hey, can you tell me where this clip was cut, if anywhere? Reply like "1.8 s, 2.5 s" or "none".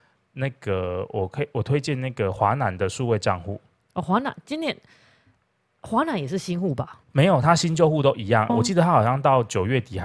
7.0 s, 8.5 s